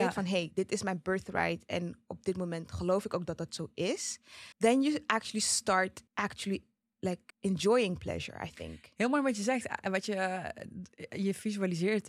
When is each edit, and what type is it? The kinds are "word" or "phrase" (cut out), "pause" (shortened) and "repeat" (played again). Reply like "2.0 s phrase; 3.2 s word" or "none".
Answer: 4.5 s pause; 6.1 s pause; 7.3 s pause